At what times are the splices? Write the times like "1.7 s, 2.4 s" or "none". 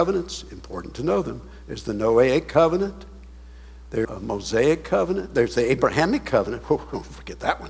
4.0 s